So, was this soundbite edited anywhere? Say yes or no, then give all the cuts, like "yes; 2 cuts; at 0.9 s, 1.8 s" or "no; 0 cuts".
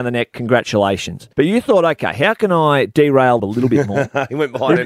yes; 2 cuts; at 1.3 s, 3.4 s